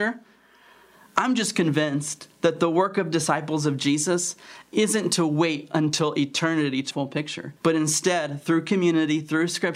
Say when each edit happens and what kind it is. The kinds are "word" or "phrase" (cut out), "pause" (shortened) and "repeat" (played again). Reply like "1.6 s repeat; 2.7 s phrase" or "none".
6.9 s phrase; 7.6 s pause